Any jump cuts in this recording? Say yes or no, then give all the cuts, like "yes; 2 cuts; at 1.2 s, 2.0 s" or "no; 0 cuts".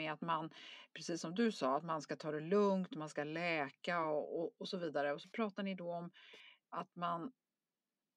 no; 0 cuts